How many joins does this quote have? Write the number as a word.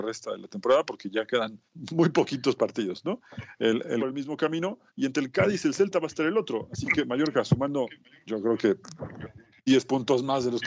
three